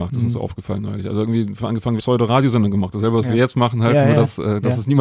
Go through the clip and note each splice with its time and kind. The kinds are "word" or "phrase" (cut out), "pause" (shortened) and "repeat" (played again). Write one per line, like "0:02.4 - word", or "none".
0:02.0 - phrase